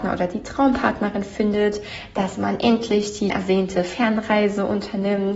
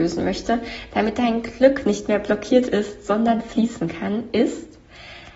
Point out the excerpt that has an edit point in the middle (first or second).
first